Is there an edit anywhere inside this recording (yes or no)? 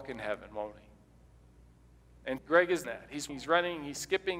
yes